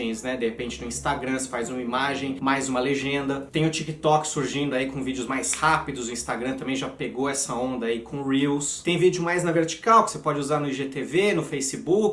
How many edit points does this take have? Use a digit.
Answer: 0